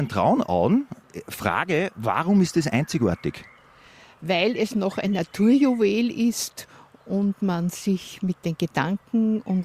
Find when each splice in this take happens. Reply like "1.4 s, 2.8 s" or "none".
none